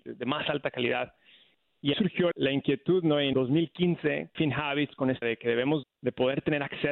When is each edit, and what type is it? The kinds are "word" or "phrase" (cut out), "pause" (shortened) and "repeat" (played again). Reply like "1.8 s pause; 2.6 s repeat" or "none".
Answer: 1.9 s word; 2.3 s word; 3.3 s word; 4.3 s word; 5.2 s word; 5.8 s word